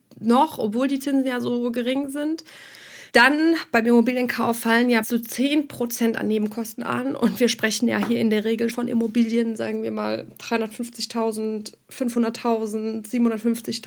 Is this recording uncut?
no; 3 cuts; at 3.1 s, 5.0 s, 8.7 s

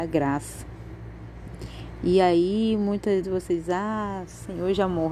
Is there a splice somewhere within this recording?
yes; 1 cut; at 3.2 s

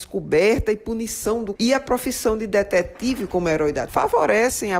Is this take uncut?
no; 2 cuts; at 1.6 s, 3.9 s

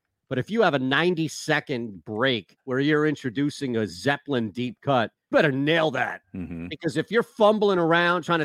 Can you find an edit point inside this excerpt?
yes; 3 cuts; at 2.6 s, 5.3 s, 6.2 s

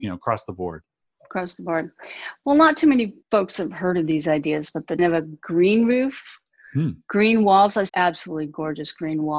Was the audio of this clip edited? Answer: yes; 3 cuts; at 3.2 s, 5.0 s, 7.9 s

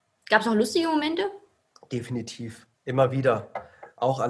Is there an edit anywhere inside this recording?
yes; 1 cut; at 2.7 s

